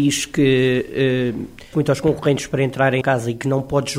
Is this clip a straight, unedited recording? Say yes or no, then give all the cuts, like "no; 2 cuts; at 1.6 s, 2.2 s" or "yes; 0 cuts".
no; 2 cuts; at 1.7 s, 3.0 s